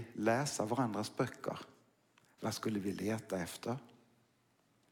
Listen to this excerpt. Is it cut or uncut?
uncut